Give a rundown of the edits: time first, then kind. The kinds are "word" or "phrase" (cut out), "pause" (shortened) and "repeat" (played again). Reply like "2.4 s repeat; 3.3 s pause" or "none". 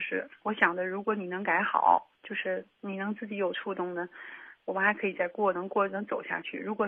2.1 s pause